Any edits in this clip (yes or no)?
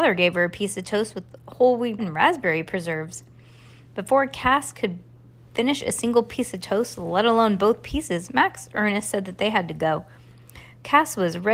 yes